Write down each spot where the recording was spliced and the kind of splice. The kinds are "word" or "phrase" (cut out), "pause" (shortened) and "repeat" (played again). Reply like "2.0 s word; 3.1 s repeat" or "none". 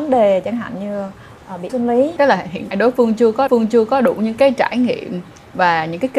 1.7 s word; 2.7 s word; 3.5 s repeat